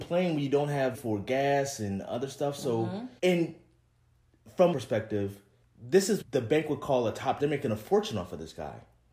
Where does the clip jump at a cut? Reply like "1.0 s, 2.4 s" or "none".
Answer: 0.9 s, 3.2 s, 4.7 s, 5.6 s, 6.2 s, 7.4 s